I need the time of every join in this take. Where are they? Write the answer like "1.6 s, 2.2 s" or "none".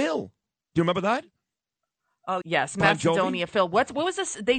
2.4 s